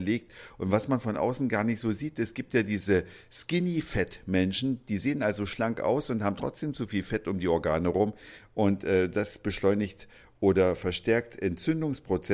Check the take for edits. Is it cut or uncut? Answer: uncut